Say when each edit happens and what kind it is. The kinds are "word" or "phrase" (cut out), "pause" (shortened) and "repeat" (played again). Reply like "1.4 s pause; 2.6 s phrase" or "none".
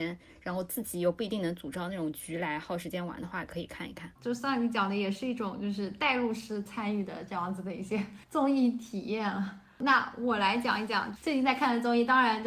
4.2 s pause; 8.2 s pause